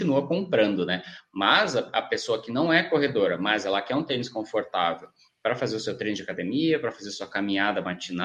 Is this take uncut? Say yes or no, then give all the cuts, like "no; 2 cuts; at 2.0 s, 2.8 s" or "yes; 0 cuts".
yes; 0 cuts